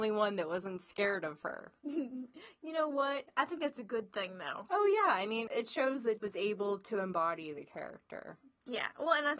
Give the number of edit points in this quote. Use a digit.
1